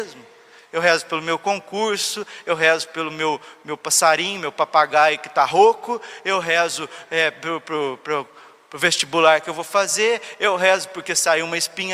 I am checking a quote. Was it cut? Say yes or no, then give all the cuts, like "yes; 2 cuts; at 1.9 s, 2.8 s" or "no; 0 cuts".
no; 0 cuts